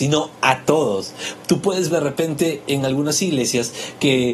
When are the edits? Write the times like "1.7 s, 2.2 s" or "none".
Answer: 1.9 s